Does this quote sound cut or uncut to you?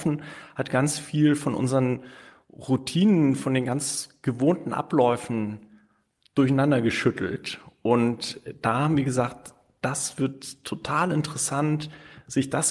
uncut